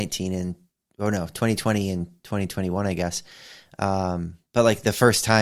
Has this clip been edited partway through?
no; 0 cuts

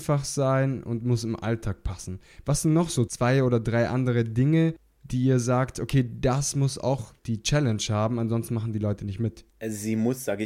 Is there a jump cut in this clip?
yes; 2 cuts; at 7.2 s, 9.5 s

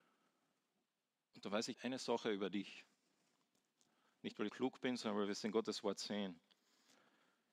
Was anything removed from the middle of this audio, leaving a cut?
yes; 2 cuts; at 1.7 s, 4.5 s

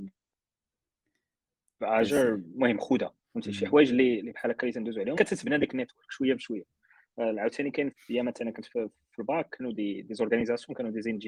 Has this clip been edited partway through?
yes; 4 cuts; at 3.2 s, 5.2 s, 7.9 s, 9.5 s

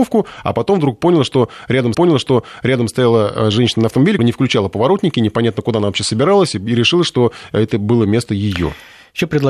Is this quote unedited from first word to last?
no; 2 cuts; at 1.9 s, 4.2 s

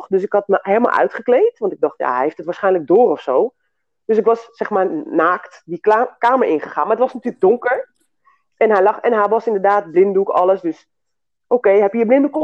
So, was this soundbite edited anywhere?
no; 0 cuts

